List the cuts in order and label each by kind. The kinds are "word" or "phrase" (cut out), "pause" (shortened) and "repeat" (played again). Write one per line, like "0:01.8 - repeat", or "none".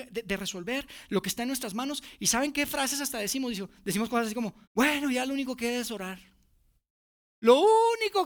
0:04.6 - pause

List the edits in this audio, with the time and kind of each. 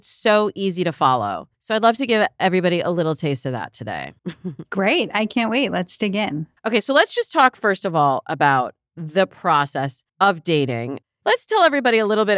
0:01.5 - pause
0:04.2 - pause
0:06.6 - pause

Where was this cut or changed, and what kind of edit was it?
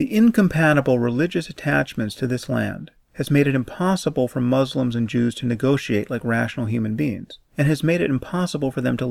none

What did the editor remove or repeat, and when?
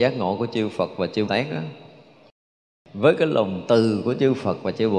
0:01.3 - word

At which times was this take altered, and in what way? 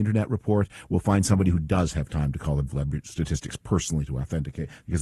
0:02.7 - word

